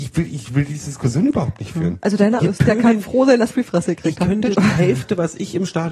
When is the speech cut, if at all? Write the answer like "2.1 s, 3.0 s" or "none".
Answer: 2.4 s, 3.5 s, 4.5 s